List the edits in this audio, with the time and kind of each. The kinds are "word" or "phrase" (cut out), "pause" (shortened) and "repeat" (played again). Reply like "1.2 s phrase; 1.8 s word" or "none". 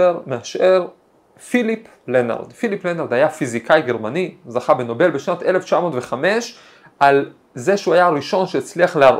none